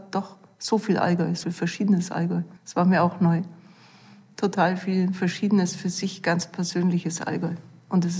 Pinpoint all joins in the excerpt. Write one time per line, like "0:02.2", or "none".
0:01.4
0:02.6